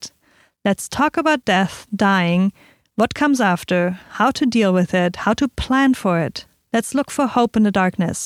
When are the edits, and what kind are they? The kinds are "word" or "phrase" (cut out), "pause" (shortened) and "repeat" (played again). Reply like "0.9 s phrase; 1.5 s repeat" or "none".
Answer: none